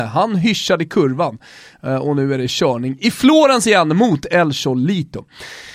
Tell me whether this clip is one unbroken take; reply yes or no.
yes